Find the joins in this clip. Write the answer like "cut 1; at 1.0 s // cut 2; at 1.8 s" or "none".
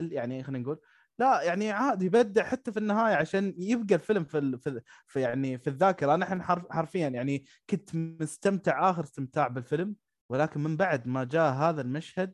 none